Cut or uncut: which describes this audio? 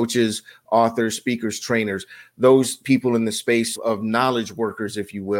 cut